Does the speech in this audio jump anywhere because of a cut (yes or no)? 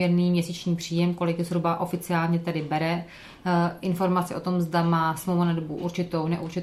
no